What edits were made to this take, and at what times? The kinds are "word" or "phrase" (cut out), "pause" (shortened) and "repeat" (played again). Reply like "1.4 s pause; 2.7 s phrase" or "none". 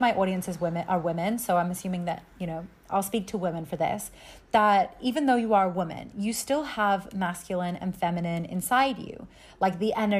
none